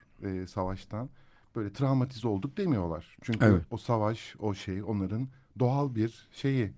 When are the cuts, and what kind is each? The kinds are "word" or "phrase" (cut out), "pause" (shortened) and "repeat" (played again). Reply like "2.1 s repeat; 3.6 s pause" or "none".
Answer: none